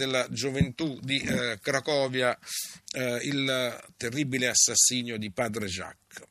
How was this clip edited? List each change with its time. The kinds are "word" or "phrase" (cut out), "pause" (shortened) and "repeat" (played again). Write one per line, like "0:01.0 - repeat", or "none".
none